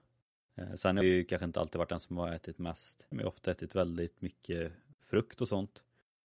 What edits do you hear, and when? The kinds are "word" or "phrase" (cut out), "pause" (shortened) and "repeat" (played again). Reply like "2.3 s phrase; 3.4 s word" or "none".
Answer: 1.0 s word; 3.1 s word